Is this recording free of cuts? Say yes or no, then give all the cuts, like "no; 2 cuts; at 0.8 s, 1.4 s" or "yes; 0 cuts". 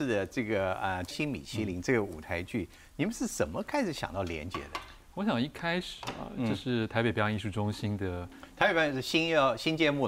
no; 1 cut; at 1.1 s